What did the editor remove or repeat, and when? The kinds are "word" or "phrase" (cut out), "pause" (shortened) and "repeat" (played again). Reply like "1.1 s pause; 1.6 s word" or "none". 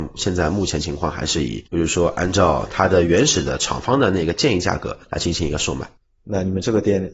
1.7 s pause; 5.0 s pause; 6.0 s pause